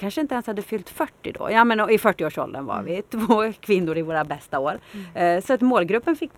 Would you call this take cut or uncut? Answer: uncut